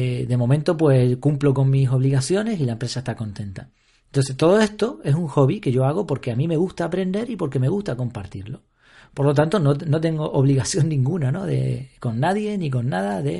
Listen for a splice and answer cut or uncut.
uncut